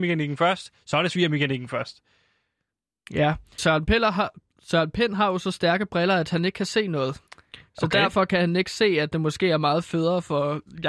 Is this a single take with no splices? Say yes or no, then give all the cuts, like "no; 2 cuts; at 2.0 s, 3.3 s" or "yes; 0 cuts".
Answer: no; 2 cuts; at 3.6 s, 7.3 s